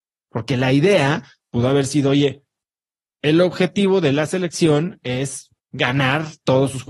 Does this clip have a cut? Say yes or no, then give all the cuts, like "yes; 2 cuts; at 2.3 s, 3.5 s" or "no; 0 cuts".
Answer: yes; 1 cut; at 5.6 s